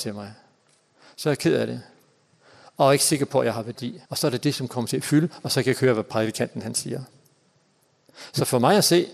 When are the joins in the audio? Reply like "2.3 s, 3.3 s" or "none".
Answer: 4.1 s